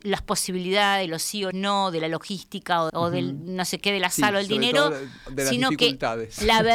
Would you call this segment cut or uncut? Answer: cut